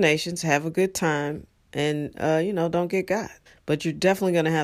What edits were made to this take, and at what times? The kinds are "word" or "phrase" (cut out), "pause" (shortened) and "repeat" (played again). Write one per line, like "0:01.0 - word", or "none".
0:03.5 - pause